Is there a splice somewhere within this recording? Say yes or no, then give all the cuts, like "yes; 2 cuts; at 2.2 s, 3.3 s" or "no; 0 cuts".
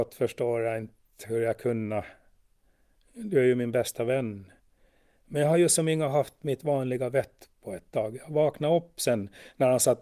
no; 0 cuts